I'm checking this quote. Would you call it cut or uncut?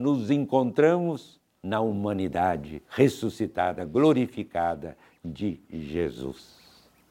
cut